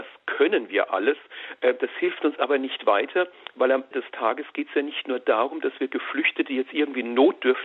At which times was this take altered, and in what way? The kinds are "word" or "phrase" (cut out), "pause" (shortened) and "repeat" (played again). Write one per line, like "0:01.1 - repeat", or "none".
0:03.9 - word